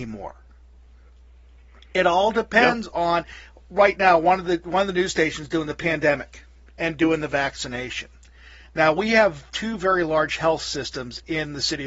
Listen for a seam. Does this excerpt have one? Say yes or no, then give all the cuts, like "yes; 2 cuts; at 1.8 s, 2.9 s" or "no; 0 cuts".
no; 0 cuts